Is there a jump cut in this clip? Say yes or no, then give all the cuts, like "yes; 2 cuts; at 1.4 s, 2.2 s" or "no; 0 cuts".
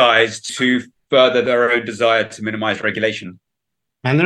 no; 0 cuts